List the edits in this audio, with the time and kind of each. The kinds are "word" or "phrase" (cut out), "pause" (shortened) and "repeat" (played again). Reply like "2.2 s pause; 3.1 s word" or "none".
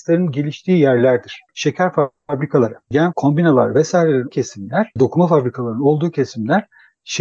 1.5 s pause; 3.1 s word; 4.3 s word; 5.0 s word